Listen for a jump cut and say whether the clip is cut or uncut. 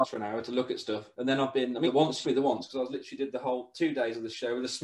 cut